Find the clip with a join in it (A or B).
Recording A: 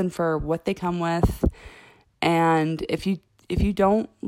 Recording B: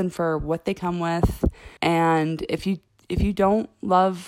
B